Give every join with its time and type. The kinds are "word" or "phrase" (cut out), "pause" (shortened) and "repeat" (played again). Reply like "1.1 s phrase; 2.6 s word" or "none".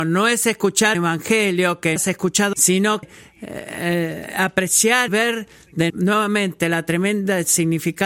0.9 s word; 2.0 s word; 2.5 s word; 3.0 s word; 5.1 s word; 5.9 s word

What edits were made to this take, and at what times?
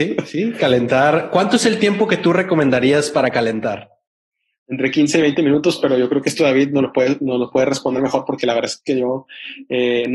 none

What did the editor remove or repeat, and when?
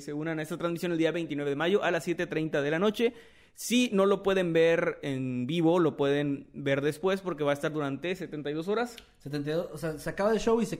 none

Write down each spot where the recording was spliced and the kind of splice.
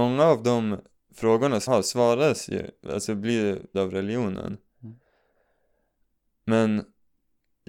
1.1 s word; 1.7 s word; 3.7 s word

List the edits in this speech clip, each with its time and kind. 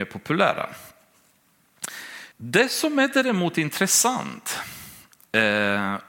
2.3 s pause

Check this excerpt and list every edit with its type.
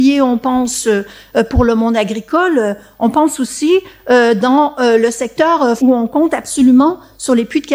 5.8 s word

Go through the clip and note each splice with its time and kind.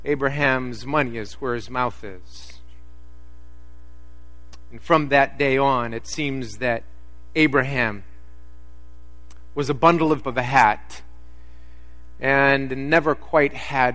10.2 s phrase

